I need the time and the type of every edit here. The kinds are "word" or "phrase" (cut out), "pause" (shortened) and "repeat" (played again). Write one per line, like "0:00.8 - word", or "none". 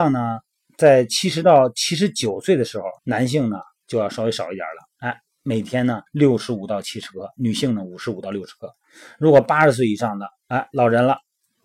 0:03.0 - pause
0:06.1 - pause